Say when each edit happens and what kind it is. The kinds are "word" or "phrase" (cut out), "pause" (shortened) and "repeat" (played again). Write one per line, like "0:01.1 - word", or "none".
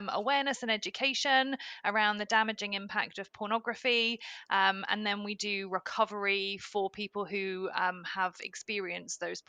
none